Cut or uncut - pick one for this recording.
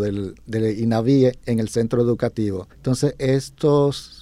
cut